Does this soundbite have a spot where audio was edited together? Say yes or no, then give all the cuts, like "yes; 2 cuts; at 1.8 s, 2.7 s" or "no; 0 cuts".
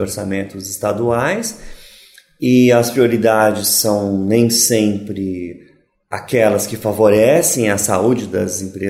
no; 0 cuts